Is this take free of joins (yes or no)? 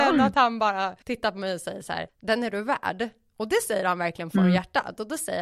no